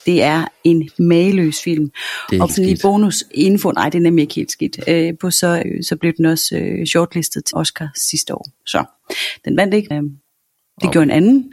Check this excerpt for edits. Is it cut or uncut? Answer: cut